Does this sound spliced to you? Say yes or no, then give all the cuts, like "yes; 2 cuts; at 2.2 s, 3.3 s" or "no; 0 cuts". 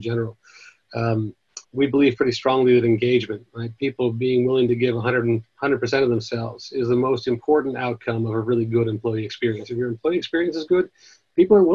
yes; 1 cut; at 1.6 s